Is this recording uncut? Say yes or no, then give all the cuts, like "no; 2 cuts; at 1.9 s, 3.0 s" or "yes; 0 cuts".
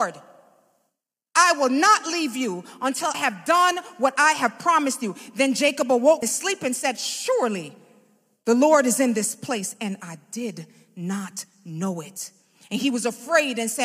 no; 2 cuts; at 3.1 s, 6.2 s